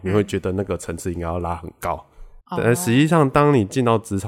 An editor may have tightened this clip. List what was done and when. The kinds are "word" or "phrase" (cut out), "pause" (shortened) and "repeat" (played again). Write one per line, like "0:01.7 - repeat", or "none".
0:02.4 - pause